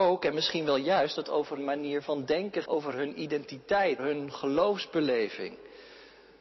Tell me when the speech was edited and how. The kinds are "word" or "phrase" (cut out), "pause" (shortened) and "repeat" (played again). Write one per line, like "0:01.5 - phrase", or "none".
0:01.2 - word
0:01.6 - word
0:02.6 - word
0:04.0 - word